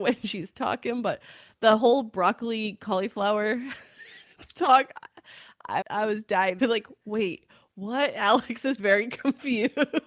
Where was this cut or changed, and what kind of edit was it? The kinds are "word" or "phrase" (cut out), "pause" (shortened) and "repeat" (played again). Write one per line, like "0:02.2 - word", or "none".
0:05.8 - word
0:06.6 - word
0:08.8 - word